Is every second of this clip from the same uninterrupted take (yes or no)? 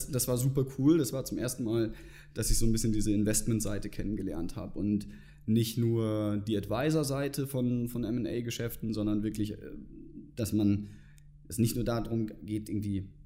yes